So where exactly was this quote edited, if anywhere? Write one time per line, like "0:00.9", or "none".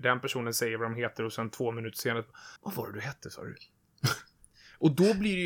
0:02.6